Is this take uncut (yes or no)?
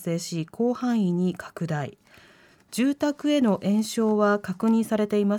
yes